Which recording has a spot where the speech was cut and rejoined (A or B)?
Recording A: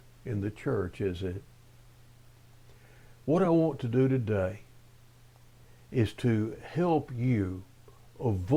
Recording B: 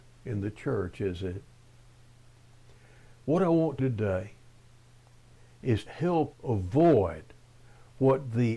B